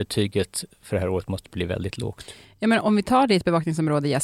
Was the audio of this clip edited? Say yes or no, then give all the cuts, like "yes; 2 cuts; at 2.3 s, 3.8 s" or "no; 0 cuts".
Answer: yes; 1 cut; at 2.8 s